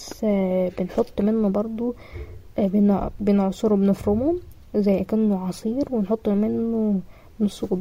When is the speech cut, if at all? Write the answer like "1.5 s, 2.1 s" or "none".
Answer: none